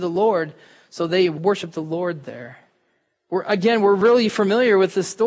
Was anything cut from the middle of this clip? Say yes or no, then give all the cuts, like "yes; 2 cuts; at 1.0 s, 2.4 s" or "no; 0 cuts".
no; 0 cuts